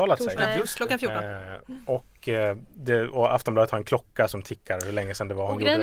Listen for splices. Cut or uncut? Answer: uncut